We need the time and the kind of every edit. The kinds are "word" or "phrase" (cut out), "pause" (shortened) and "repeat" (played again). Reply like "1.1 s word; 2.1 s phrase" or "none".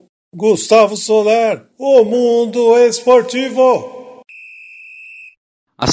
1.7 s pause